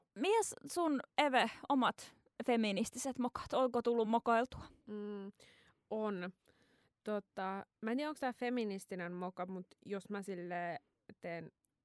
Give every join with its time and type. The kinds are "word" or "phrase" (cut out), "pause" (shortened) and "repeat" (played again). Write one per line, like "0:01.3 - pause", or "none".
none

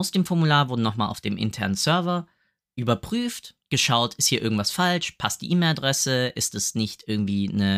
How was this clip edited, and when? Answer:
0:03.6 - pause

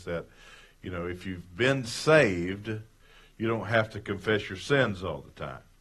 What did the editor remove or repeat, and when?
none

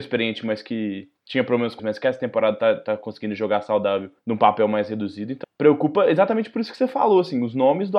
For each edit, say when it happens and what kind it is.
0:01.2 - pause
0:01.8 - word
0:04.2 - pause
0:05.4 - word

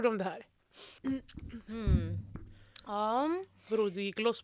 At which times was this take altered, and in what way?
0:01.0 - pause

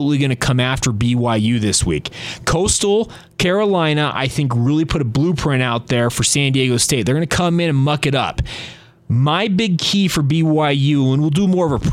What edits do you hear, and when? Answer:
none

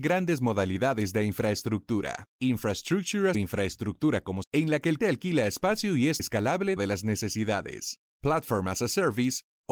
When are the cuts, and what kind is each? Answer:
0:03.3 - phrase
0:04.4 - word
0:05.0 - word
0:06.2 - word
0:06.8 - word

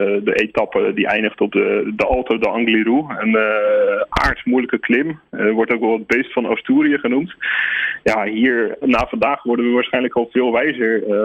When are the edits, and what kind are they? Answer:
0:08.8 - word

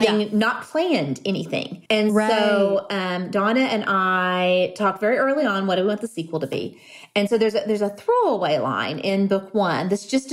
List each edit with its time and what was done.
0:01.9 - pause

